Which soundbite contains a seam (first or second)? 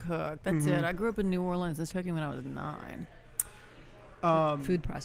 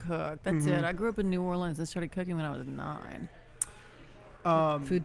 first